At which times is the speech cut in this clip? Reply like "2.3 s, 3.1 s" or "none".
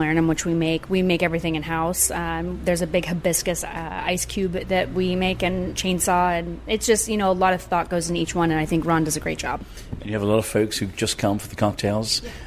none